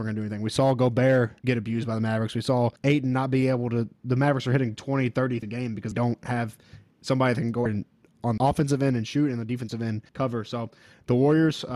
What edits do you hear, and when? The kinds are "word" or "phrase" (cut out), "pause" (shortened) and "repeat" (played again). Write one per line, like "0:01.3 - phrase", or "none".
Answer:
0:01.4 - pause
0:02.8 - pause
0:05.4 - word
0:05.9 - word
0:07.7 - phrase
0:08.4 - word
0:10.1 - pause